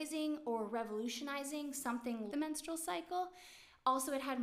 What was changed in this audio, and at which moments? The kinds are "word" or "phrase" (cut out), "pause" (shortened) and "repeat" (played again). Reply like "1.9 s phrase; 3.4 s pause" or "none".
2.3 s word